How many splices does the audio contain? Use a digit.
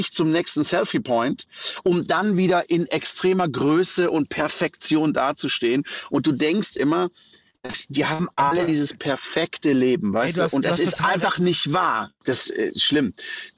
0